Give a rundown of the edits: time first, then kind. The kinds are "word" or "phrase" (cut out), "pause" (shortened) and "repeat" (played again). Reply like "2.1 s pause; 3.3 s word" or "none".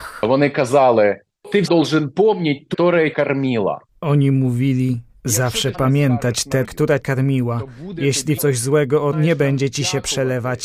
1.7 s word; 2.7 s word; 3.1 s word; 5.7 s word; 6.6 s word; 7.0 s word; 8.4 s word; 9.1 s word